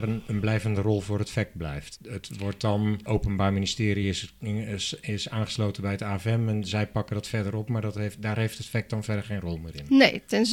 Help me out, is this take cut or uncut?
uncut